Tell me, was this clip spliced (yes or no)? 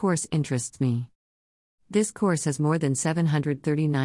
no